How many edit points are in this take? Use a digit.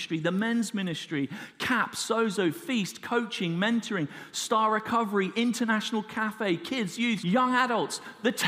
1